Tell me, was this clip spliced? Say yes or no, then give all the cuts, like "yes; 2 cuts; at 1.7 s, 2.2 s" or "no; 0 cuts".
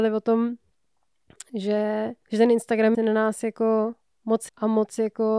yes; 3 cuts; at 2.2 s, 2.9 s, 4.5 s